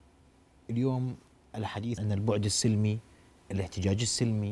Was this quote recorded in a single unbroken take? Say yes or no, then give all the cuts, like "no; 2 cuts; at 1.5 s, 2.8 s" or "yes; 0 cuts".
no; 1 cut; at 2.0 s